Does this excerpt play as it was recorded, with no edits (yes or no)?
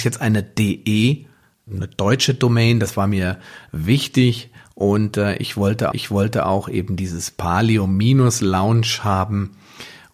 no